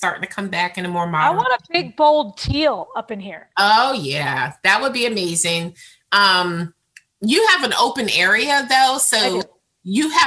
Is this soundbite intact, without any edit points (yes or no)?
yes